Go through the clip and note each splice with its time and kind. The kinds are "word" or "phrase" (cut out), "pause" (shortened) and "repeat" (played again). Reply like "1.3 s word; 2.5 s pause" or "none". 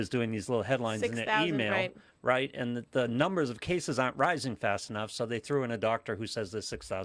none

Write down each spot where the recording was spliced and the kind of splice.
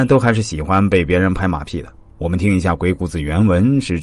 2.1 s pause

